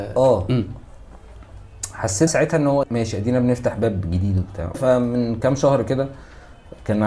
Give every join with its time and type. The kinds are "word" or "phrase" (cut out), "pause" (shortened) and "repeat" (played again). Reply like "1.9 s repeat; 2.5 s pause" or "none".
2.3 s word; 2.8 s word; 4.7 s word